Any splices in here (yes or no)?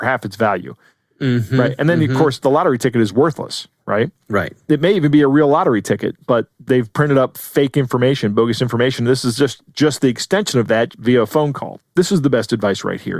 yes